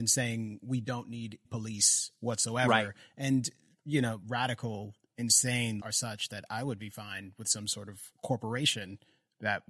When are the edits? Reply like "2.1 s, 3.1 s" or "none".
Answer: 1.4 s, 4.2 s, 5.8 s